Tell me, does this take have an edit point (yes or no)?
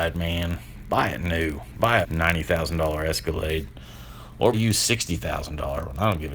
yes